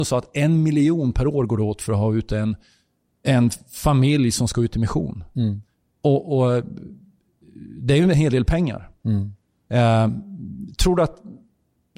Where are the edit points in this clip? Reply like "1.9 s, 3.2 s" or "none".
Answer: none